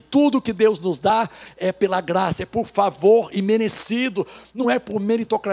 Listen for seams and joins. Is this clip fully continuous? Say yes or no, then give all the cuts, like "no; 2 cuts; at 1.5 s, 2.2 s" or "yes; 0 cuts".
yes; 0 cuts